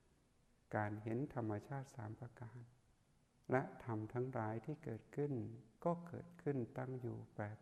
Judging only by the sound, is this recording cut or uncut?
cut